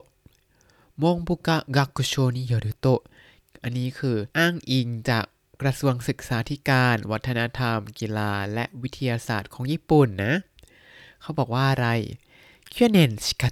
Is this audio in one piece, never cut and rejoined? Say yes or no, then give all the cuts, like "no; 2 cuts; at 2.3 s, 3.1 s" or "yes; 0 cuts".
no; 1 cut; at 4.3 s